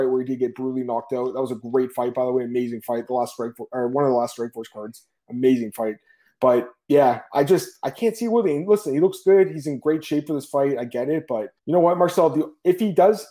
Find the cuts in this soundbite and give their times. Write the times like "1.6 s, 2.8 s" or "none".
11.6 s